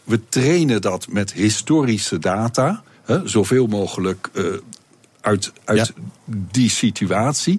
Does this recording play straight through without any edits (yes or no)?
yes